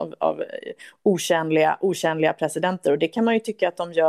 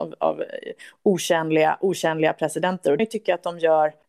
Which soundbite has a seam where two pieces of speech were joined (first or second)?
second